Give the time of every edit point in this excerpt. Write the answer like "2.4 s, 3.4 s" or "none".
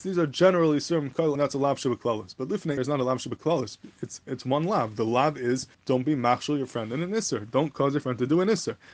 1.4 s, 2.8 s, 5.7 s